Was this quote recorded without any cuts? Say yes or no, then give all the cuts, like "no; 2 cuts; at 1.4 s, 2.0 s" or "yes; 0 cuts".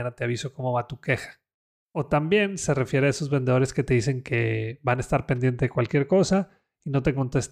yes; 0 cuts